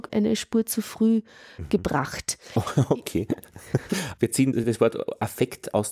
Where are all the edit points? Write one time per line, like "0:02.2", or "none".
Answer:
none